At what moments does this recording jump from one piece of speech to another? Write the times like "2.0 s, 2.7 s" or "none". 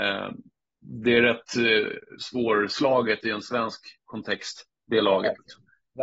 none